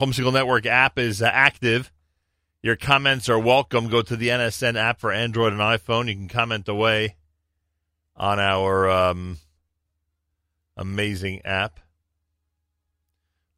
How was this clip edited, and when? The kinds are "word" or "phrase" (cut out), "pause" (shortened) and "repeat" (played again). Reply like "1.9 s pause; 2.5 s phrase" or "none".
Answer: none

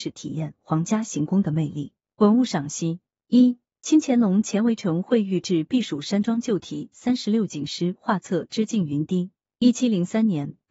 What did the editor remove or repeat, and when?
none

